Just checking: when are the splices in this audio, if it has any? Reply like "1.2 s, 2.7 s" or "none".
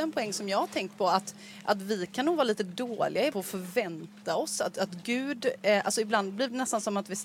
3.3 s